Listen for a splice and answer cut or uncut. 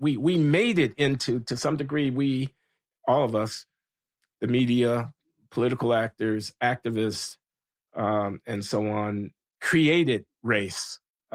uncut